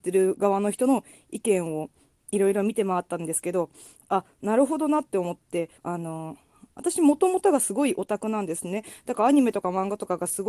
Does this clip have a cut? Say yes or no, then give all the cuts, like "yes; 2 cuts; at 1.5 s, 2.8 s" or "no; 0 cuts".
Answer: yes; 1 cut; at 5.8 s